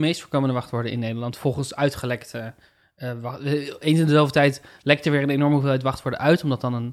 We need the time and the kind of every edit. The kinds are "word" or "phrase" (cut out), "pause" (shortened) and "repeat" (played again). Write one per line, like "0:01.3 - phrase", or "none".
none